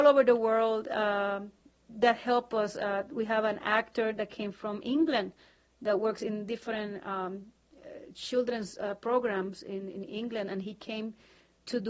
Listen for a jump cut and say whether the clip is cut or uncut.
uncut